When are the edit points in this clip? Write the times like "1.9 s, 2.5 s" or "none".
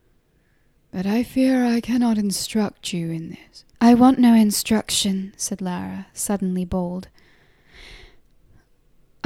3.7 s